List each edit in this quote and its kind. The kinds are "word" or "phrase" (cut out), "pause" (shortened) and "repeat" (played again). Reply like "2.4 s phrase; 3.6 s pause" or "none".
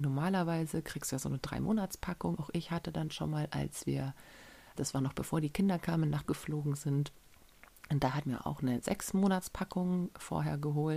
2.4 s word; 4.8 s word; 6.2 s word; 8.2 s word